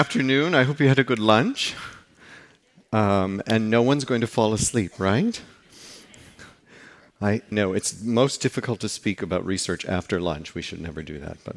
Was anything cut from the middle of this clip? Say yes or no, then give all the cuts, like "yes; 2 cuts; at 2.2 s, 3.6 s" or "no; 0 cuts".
yes; 1 cut; at 7.5 s